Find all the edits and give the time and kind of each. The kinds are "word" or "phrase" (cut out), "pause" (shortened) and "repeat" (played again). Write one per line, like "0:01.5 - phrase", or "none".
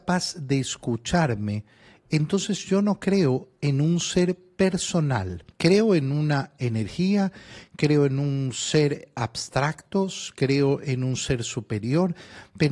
0:05.5 - pause